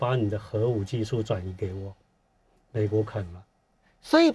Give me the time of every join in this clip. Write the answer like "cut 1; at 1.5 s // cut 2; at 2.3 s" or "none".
none